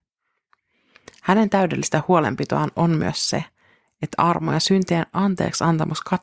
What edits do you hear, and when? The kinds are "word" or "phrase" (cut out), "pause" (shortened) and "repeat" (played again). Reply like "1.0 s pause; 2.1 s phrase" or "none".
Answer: none